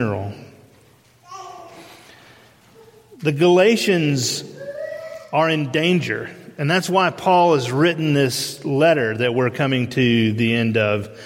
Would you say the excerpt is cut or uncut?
uncut